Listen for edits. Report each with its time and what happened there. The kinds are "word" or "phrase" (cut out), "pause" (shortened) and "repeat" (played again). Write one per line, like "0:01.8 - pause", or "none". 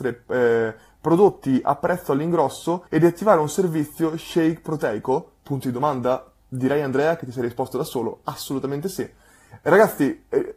0:02.9 - pause